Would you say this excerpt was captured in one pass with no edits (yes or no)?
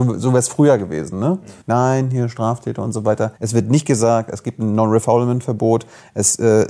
no